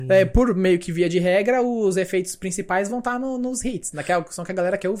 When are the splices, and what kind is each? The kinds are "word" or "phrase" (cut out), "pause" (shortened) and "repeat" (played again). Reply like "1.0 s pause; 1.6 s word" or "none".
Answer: none